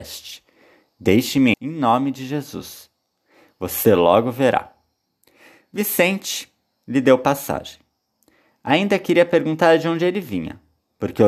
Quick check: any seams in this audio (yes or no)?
yes